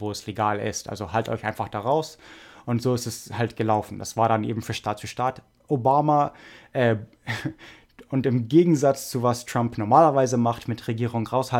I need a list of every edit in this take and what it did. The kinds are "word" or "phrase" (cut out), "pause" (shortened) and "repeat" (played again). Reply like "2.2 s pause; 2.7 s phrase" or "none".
none